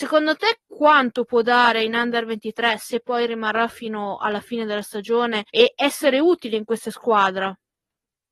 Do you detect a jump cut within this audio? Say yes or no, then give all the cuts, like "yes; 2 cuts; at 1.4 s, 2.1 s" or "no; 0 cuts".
yes; 1 cut; at 5.5 s